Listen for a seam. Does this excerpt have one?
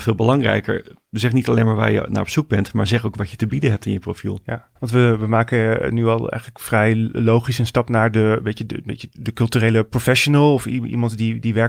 yes; 1 cut; at 4.8 s

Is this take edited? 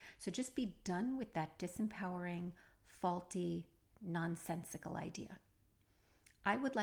no; 0 cuts

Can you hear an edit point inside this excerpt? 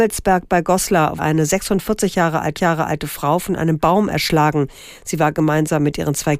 yes; 2 cuts; at 1.2 s, 2.6 s

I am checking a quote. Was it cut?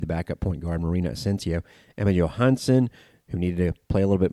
no; 0 cuts

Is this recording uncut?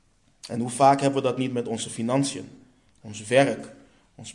yes; 0 cuts

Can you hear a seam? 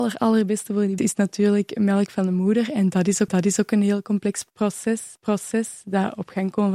yes; 3 cuts; at 1.0 s, 3.3 s, 5.2 s

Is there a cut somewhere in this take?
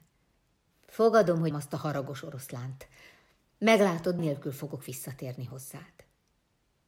yes; 2 cuts; at 1.5 s, 4.2 s

